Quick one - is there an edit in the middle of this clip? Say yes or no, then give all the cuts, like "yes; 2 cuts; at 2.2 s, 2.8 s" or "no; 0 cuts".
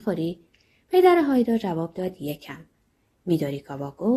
no; 0 cuts